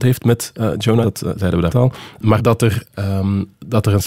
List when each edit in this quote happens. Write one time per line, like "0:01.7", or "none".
0:01.0
0:01.7
0:02.4

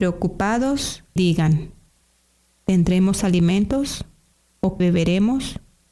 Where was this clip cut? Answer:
0:01.2
0:04.8

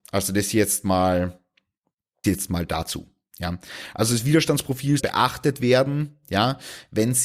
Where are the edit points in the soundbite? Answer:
0:02.2
0:05.0

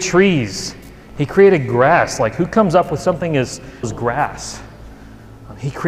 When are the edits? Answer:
0:03.8

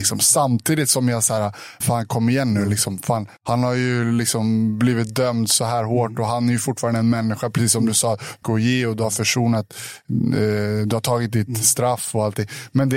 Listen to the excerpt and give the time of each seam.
0:01.8
0:03.4
0:08.4

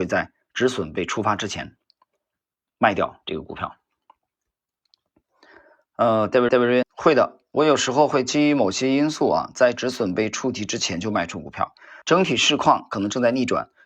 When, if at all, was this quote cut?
0:06.5
0:06.8
0:12.0

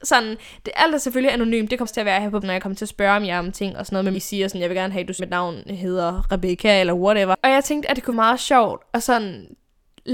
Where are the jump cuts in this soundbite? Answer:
0:01.8
0:02.4
0:04.1
0:05.2
0:08.1

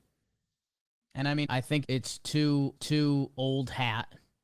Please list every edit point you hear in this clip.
0:01.4
0:01.8
0:02.8

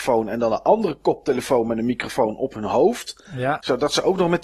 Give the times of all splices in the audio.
none

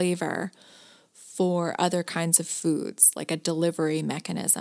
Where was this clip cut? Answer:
none

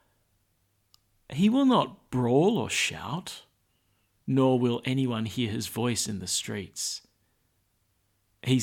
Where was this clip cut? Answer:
none

